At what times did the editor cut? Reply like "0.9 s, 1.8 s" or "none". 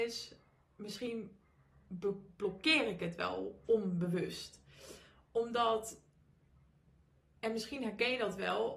none